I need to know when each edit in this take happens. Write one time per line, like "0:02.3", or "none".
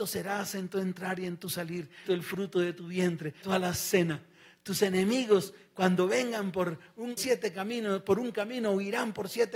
0:02.1
0:03.4
0:07.2